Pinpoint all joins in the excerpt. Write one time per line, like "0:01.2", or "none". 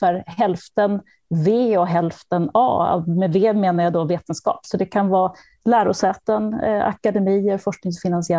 none